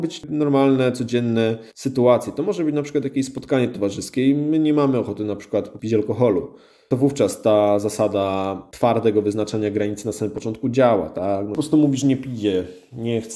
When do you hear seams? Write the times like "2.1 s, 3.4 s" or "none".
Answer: 1.7 s

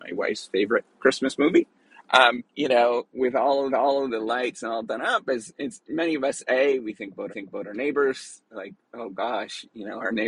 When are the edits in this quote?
0.9 s, 2.5 s, 3.1 s, 3.7 s, 7.3 s

